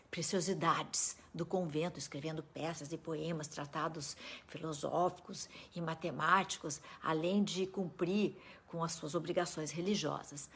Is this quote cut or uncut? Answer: uncut